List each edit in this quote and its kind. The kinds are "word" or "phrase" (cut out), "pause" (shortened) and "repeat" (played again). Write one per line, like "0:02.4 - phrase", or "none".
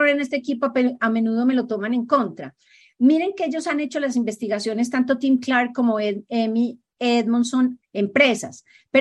0:07.8 - word